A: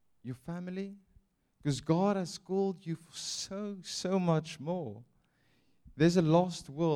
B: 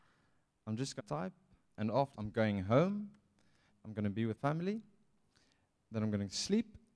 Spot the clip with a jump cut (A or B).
B